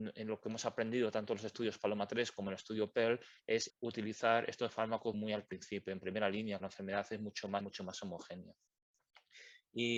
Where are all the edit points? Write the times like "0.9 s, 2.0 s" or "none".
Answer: 3.7 s, 5.1 s, 6.6 s, 7.6 s